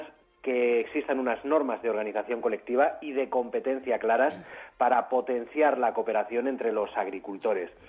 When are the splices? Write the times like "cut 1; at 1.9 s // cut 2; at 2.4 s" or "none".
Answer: none